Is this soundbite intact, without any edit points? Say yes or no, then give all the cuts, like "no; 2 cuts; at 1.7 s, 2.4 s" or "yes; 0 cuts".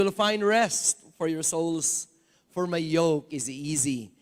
yes; 0 cuts